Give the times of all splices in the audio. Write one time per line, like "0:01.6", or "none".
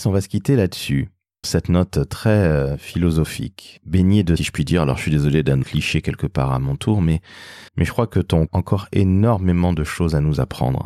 0:01.4
0:04.4
0:05.6
0:07.7
0:08.5